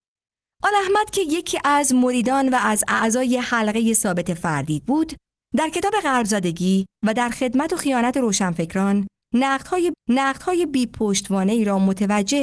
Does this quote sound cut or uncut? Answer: cut